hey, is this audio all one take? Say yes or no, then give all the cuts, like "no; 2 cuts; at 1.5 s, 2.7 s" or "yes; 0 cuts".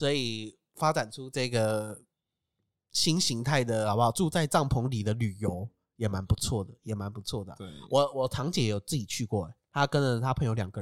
no; 1 cut; at 9.7 s